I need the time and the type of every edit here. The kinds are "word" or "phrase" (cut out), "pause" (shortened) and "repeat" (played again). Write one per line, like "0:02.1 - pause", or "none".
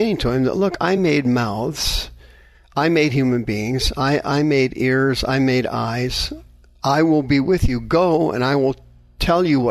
none